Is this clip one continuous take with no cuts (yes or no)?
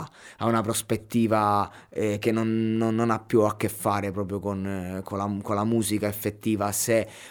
yes